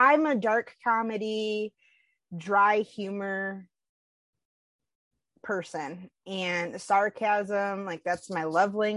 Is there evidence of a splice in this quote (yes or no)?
no